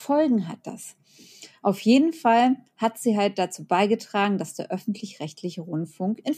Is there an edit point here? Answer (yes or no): no